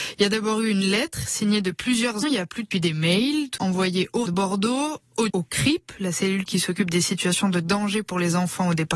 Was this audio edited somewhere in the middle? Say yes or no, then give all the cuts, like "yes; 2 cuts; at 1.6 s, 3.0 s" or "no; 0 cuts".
yes; 5 cuts; at 2.2 s, 2.7 s, 3.6 s, 4.3 s, 5.3 s